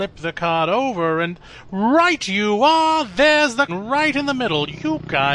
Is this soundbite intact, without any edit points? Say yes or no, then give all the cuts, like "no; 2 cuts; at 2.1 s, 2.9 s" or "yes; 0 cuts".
no; 1 cut; at 3.7 s